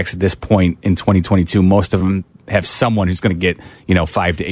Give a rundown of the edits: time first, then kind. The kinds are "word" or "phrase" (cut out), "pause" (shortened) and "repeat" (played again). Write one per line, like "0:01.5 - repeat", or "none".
none